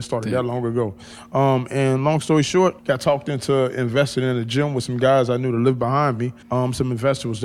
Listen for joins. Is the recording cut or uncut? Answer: cut